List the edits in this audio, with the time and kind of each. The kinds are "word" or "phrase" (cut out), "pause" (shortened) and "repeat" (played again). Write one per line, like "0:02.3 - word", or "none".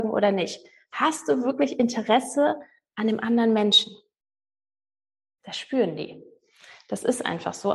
none